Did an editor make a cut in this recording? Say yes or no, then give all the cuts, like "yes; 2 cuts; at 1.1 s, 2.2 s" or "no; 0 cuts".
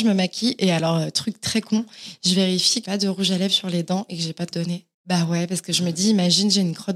yes; 2 cuts; at 2.8 s, 4.5 s